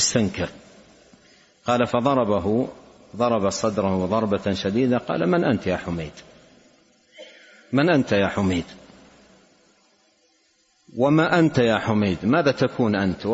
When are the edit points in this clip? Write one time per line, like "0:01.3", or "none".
none

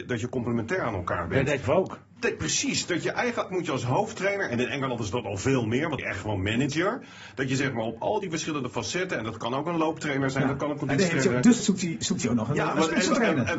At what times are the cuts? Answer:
0:01.6
0:03.5
0:06.0
0:11.6

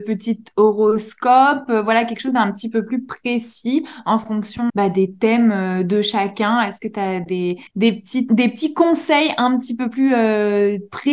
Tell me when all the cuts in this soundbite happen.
0:04.7
0:07.7
0:08.3

